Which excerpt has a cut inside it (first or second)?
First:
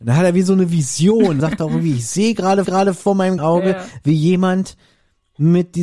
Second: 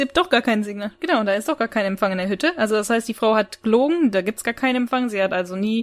first